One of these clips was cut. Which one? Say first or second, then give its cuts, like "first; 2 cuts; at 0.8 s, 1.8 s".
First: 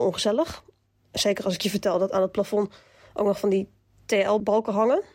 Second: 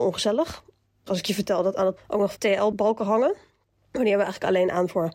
second; 3 cuts; at 1.1 s, 2.0 s, 2.3 s